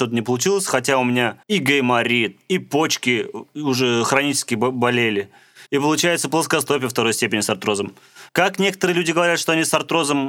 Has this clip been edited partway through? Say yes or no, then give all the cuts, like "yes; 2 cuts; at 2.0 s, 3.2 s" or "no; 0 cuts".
yes; 3 cuts; at 1.4 s, 5.7 s, 8.3 s